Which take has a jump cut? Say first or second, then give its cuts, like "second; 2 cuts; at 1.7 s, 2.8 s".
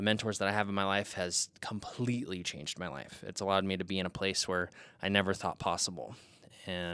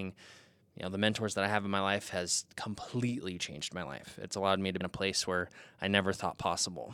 second; 1 cut; at 4.8 s